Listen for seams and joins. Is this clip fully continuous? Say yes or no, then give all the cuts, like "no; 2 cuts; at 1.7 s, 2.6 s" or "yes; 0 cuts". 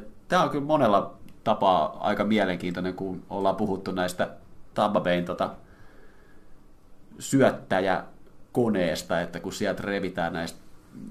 yes; 0 cuts